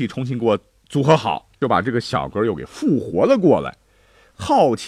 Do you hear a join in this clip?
yes; 1 cut; at 1.6 s

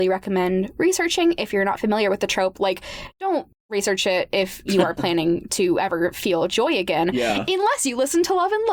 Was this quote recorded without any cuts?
yes; 0 cuts

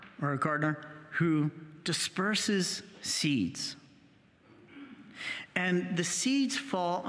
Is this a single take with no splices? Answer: yes; 0 cuts

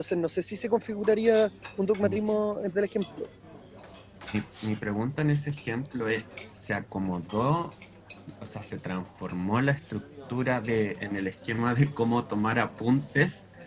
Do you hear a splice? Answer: yes; 2 cuts; at 2.7 s, 6.5 s

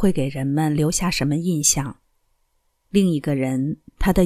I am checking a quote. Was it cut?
no; 0 cuts

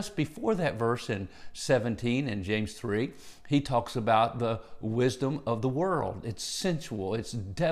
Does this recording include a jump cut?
no; 0 cuts

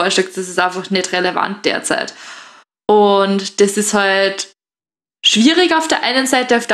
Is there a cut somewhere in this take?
no; 0 cuts

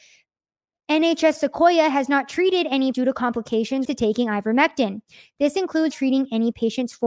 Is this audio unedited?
no; 3 cuts; at 2.9 s, 3.8 s, 5.9 s

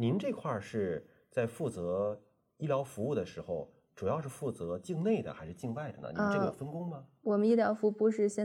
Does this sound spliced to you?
no; 0 cuts

